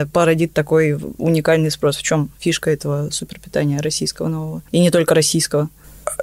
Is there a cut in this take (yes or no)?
no